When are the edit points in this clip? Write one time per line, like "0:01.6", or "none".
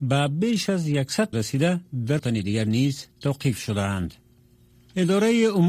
0:01.3
0:02.2

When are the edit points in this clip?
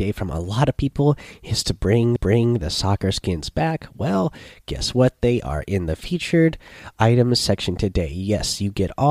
0:02.2

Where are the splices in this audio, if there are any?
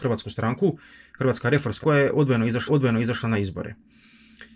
0:01.8
0:02.7

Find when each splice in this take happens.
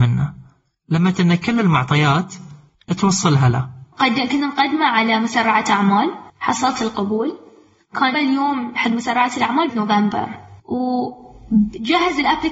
0:01.1
0:03.9
0:06.3
0:08.1
0:09.7
0:10.6

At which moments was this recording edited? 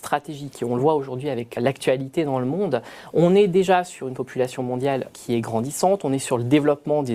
0:01.6
0:05.1

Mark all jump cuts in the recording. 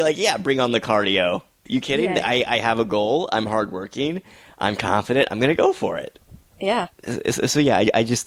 none

